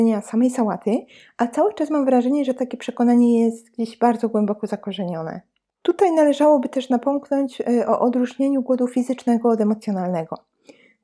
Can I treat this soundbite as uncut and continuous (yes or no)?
yes